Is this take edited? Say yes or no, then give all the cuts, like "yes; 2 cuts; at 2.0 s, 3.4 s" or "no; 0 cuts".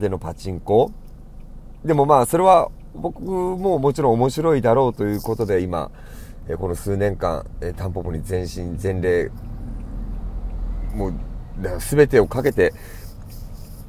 no; 0 cuts